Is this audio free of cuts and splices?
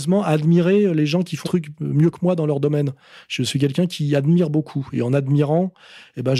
no; 1 cut; at 1.4 s

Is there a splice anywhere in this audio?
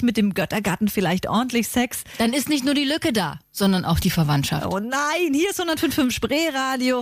yes; 1 cut; at 3.4 s

